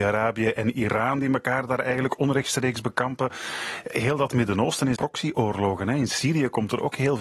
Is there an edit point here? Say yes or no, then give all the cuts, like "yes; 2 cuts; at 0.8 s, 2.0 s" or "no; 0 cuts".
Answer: yes; 1 cut; at 5.0 s